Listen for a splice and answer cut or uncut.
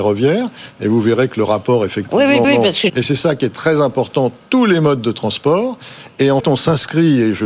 cut